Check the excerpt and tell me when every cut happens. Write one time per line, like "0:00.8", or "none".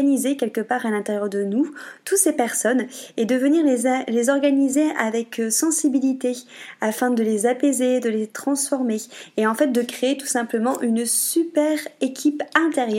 none

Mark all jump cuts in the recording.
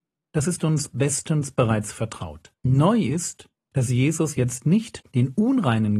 0:02.6
0:05.0

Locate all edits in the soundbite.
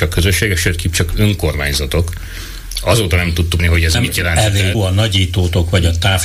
0:03.6
0:03.9
0:04.7

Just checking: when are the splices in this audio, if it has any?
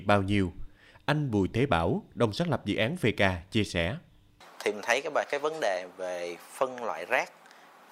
none

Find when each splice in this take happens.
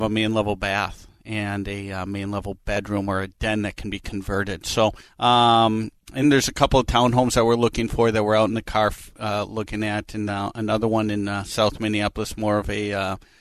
0:05.0
0:06.2
0:10.3

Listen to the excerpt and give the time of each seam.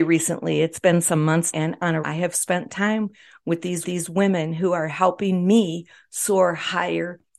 0:01.5
0:02.0
0:03.8

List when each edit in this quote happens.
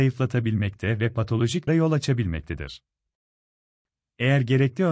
0:01.7

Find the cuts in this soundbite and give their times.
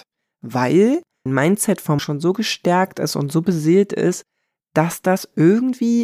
0:01.3
0:02.0

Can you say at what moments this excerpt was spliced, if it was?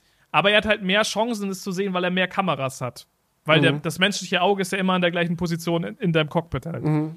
none

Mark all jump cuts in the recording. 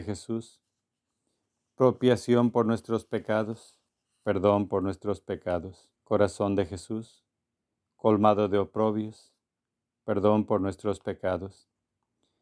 0:03.9
0:06.0

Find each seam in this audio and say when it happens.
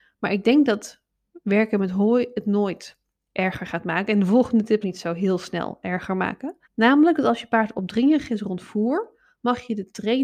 0:04.8
0:06.6

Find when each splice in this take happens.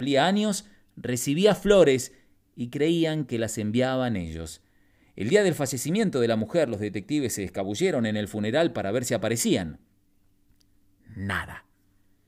none

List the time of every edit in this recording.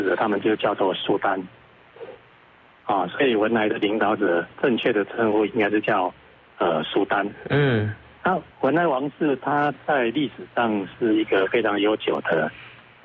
0:08.5

